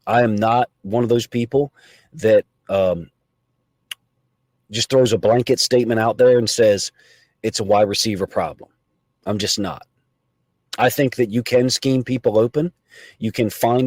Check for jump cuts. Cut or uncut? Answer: uncut